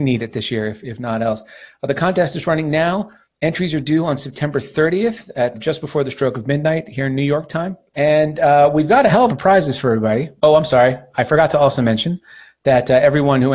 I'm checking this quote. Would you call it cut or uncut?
cut